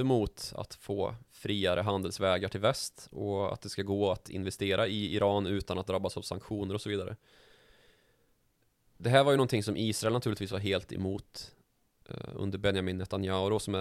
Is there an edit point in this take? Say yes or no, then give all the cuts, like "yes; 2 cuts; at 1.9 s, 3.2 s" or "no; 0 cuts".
no; 0 cuts